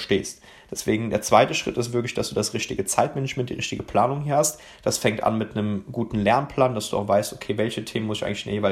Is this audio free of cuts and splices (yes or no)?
yes